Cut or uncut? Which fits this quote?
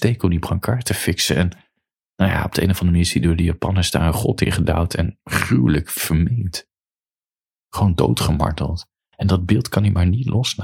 uncut